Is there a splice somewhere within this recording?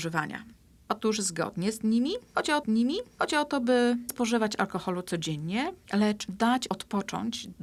yes; 3 cuts; at 2.6 s, 4.1 s, 6.7 s

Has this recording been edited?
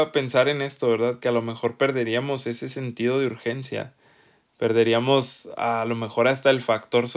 no; 0 cuts

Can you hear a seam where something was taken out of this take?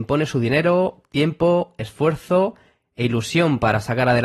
no; 0 cuts

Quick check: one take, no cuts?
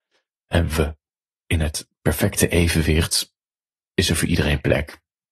yes; 0 cuts

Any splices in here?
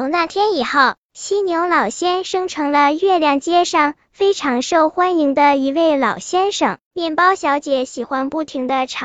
yes; 1 cut; at 6.9 s

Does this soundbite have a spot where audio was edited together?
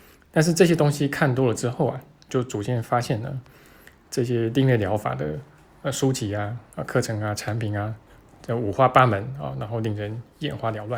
yes; 1 cut; at 2.3 s

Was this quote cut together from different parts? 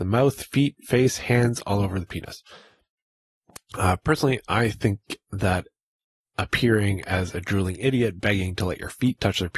no; 0 cuts

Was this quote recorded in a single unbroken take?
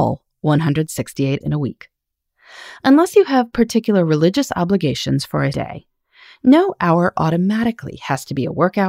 no; 2 cuts; at 1.4 s, 5.5 s

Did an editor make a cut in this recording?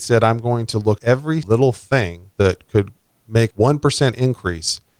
yes; 4 cuts; at 1.0 s, 1.4 s, 2.3 s, 3.5 s

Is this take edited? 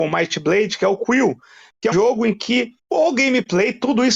yes; 2 cuts; at 1.9 s, 2.8 s

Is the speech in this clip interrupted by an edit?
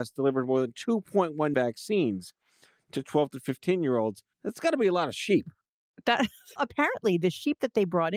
yes; 3 cuts; at 1.5 s, 4.3 s, 6.6 s

